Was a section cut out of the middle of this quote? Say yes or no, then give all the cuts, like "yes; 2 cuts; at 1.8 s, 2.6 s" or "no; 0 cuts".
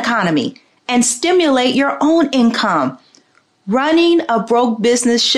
no; 0 cuts